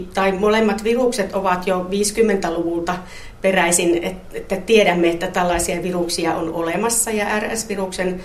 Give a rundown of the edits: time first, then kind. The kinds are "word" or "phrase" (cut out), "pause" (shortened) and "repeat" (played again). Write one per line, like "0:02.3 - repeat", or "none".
none